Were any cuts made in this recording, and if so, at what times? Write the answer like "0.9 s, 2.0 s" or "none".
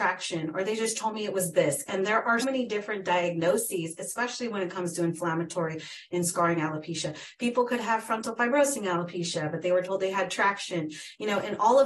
2.4 s